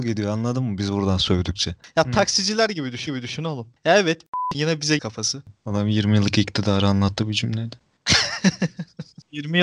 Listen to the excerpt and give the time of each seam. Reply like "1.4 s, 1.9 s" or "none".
3.1 s, 4.5 s, 5.0 s